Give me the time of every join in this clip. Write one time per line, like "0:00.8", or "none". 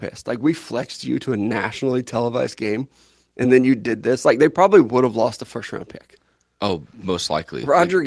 none